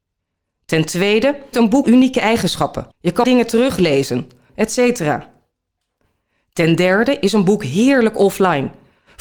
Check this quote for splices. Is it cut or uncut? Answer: cut